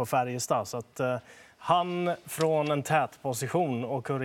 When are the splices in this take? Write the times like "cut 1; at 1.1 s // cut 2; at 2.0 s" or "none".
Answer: none

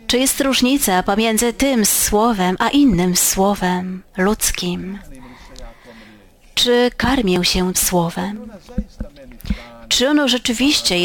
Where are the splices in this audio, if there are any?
cut 1; at 7.7 s

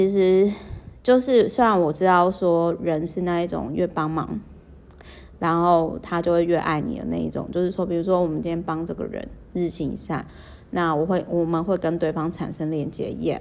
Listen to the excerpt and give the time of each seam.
none

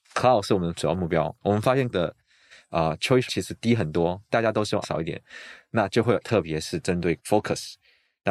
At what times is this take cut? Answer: cut 1; at 1.4 s // cut 2; at 1.9 s // cut 3; at 3.3 s // cut 4; at 4.3 s // cut 5; at 4.8 s // cut 6; at 6.2 s // cut 7; at 7.2 s

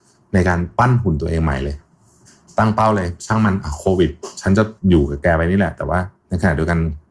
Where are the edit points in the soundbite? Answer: cut 1; at 4.8 s

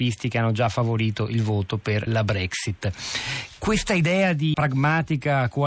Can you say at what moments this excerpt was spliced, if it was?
cut 1; at 2.1 s // cut 2; at 4.5 s

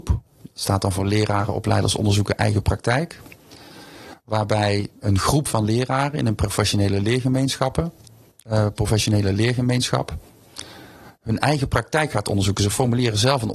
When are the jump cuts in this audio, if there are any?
none

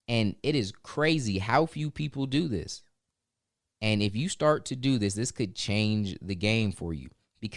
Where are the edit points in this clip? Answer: none

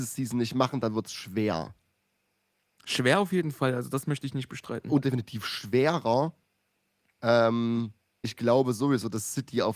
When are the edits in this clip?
cut 1; at 5.0 s // cut 2; at 8.2 s

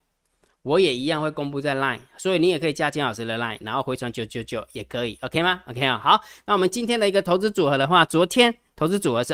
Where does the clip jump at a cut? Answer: none

